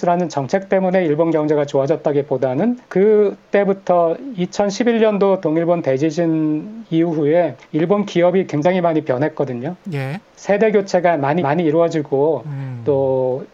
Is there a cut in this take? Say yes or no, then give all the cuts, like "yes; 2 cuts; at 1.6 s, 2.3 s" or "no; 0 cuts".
yes; 3 cuts; at 2.8 s, 7.6 s, 11.4 s